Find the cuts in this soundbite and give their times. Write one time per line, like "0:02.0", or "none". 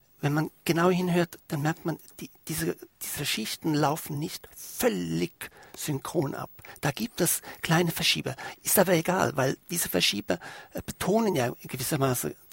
none

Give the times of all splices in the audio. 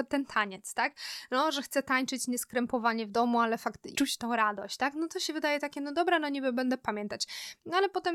0:03.9

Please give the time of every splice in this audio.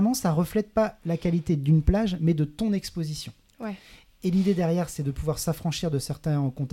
none

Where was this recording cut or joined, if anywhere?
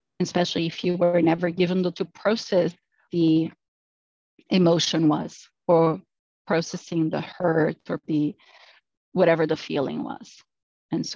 0:01.9
0:03.1
0:08.0

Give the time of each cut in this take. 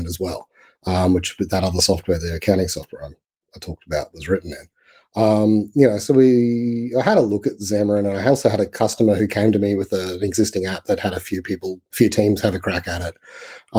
0:11.9

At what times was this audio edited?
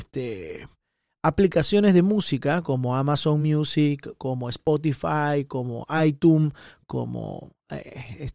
none

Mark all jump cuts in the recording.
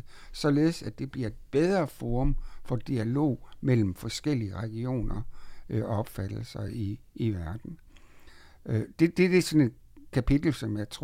none

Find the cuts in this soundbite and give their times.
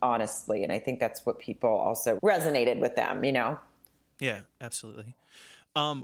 0:02.2

